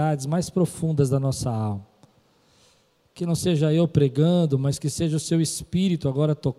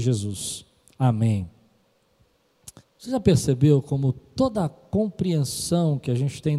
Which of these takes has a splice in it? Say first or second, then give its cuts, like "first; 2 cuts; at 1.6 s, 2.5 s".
second; 1 cut; at 2.8 s